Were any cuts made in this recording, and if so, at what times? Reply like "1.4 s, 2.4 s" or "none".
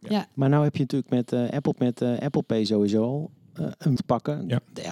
1.7 s, 4.0 s

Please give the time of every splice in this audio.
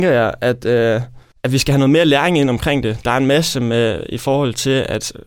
1.3 s

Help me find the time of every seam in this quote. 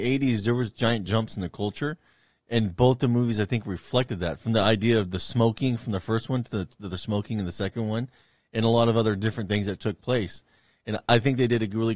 none

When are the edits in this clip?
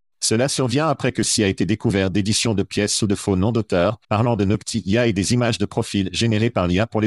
4.0 s

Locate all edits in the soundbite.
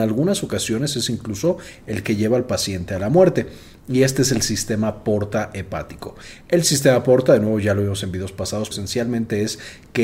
8.7 s

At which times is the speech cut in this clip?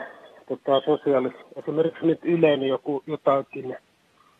1.4 s

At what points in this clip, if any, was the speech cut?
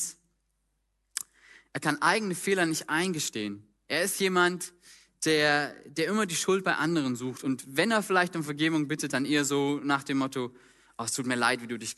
none

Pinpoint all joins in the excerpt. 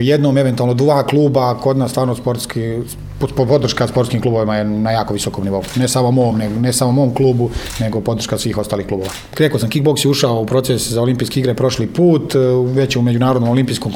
none

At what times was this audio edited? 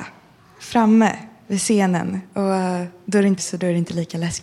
3.4 s

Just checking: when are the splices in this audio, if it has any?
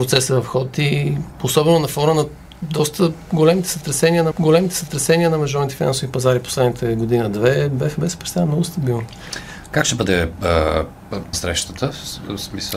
4.3 s, 11.3 s

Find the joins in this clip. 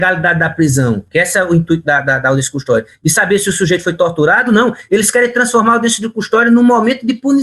none

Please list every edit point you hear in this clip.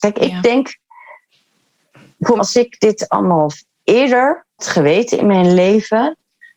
2.4 s, 4.6 s

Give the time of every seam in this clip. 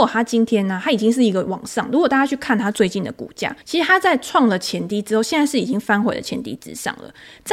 3.6 s

